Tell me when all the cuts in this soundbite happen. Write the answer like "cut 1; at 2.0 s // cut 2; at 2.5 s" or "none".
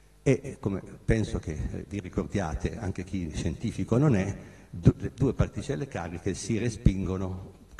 none